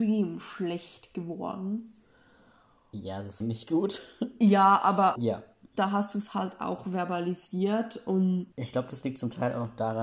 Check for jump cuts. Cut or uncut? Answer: cut